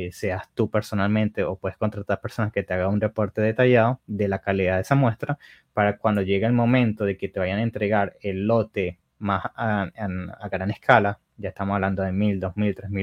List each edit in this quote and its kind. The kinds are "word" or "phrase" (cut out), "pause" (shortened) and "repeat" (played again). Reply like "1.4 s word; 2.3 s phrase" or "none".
none